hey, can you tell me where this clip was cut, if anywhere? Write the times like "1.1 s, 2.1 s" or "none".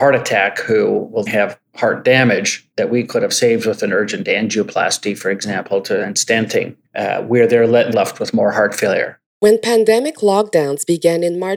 1.3 s, 2.7 s, 6.8 s, 7.9 s, 9.3 s